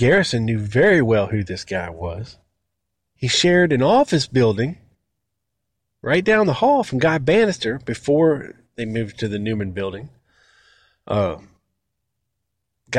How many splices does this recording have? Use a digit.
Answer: 1